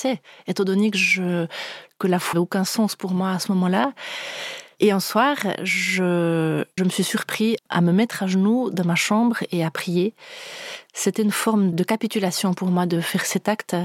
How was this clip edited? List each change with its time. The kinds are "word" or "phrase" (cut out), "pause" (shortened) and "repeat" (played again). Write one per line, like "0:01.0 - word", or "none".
0:02.3 - word
0:06.8 - word
0:07.6 - word
0:11.7 - word